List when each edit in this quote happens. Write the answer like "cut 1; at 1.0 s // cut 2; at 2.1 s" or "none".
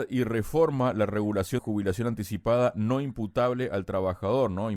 cut 1; at 1.6 s